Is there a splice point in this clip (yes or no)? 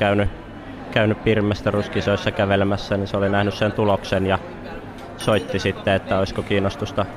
no